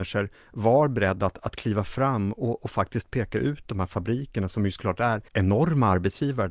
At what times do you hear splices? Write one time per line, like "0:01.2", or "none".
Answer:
0:05.3